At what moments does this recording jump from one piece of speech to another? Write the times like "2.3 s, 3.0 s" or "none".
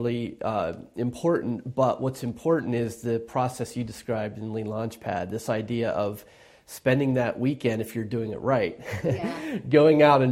none